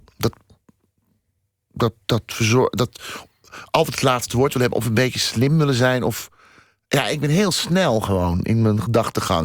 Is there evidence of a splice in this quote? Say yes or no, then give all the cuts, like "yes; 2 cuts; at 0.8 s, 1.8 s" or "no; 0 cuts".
no; 0 cuts